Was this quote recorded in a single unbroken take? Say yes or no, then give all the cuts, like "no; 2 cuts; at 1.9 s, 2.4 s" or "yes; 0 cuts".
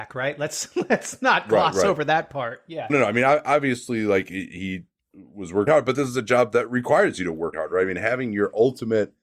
no; 3 cuts; at 2.9 s, 5.7 s, 7.5 s